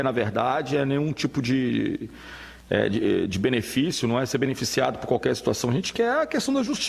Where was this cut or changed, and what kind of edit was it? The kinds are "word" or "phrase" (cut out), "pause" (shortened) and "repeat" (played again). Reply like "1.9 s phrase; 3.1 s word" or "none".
none

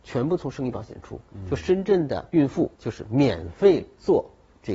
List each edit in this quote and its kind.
2.3 s pause; 2.7 s pause

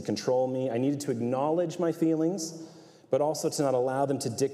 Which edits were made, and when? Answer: none

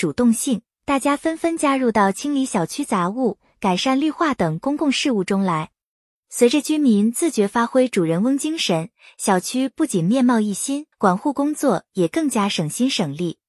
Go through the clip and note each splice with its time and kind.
10.9 s pause

